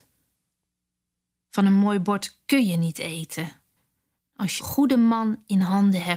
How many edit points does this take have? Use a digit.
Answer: 1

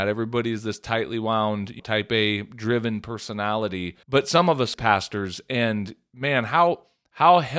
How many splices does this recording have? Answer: 3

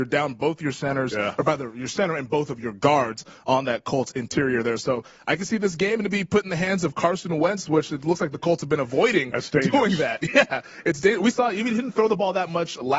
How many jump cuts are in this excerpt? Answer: 1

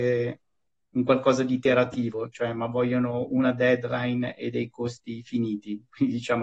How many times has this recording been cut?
0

